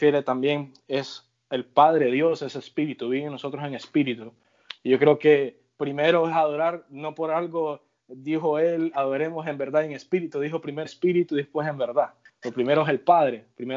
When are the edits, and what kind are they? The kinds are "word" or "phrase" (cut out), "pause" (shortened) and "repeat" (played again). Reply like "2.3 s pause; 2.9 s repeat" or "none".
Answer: 10.8 s word